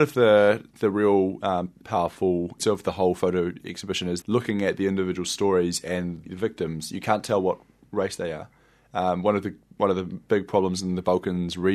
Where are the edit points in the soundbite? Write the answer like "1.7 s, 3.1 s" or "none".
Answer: 1.8 s, 2.6 s, 4.2 s, 6.3 s